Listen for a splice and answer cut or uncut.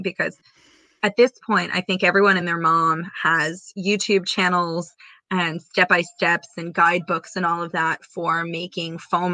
uncut